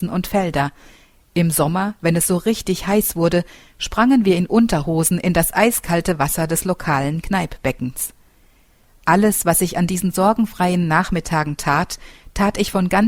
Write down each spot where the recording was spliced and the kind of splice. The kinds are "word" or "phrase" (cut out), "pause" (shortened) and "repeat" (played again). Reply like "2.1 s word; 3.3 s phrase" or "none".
none